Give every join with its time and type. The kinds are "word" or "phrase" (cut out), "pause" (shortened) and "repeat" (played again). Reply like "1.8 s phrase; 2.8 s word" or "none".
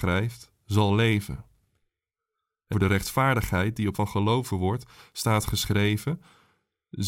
2.7 s word; 3.9 s word; 4.5 s word